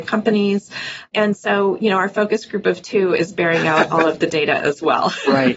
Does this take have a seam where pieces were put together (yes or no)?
no